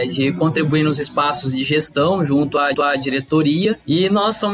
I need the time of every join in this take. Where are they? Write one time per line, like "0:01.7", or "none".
0:02.7